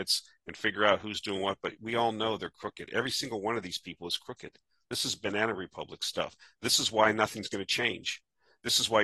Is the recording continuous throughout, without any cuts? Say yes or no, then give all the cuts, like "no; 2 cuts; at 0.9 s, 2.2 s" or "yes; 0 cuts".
yes; 0 cuts